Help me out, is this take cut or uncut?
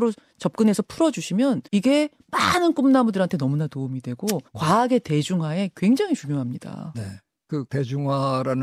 cut